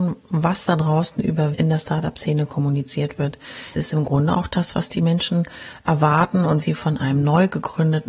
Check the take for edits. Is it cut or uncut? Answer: cut